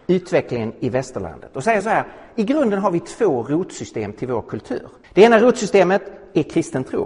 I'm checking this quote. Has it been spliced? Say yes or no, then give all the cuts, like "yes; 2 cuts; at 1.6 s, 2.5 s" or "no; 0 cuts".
yes; 1 cut; at 5.0 s